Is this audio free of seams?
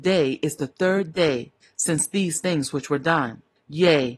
yes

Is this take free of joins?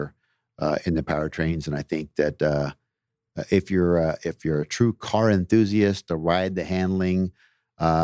yes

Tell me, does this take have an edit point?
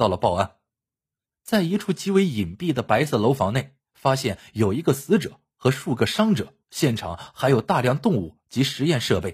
yes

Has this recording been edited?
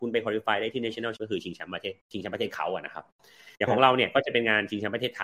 yes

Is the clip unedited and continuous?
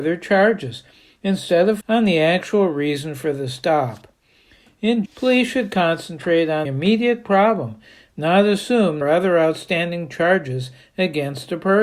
no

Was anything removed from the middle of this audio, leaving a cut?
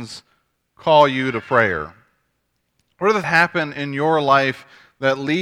yes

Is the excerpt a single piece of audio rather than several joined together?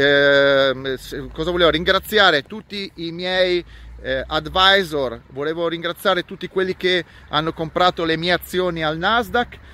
yes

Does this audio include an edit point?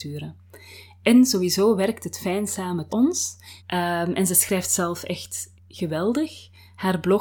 yes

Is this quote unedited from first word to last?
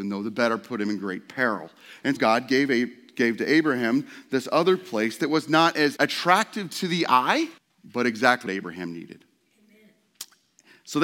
no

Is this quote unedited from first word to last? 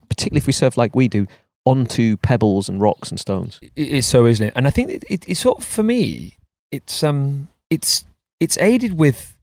yes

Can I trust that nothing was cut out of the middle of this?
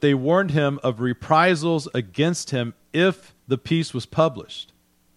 no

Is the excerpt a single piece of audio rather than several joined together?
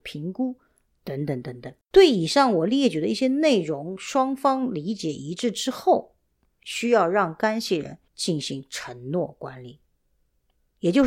no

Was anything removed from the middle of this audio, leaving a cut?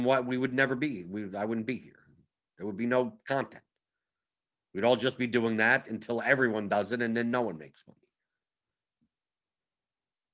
no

